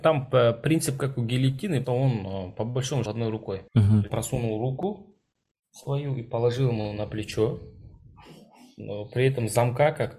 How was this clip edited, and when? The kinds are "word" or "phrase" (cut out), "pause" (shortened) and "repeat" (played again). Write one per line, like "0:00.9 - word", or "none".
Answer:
0:01.8 - word
0:03.1 - phrase
0:03.7 - pause
0:04.1 - phrase